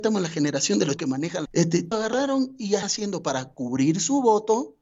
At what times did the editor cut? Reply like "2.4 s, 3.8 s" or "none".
1.0 s, 1.5 s, 1.9 s, 2.8 s